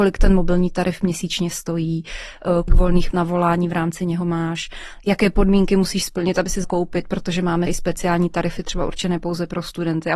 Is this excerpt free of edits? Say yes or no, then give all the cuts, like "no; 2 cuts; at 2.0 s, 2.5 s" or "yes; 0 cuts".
no; 4 cuts; at 2.7 s, 3.1 s, 6.6 s, 7.7 s